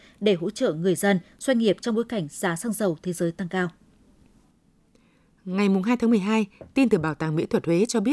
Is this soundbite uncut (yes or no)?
yes